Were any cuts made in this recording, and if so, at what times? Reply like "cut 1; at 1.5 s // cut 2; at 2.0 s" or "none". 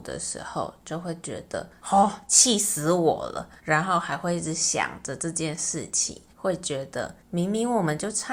cut 1; at 1.8 s // cut 2; at 3.6 s // cut 3; at 6.3 s // cut 4; at 7.2 s